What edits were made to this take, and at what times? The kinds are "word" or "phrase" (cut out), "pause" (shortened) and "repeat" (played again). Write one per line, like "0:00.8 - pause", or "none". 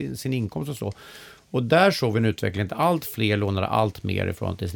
none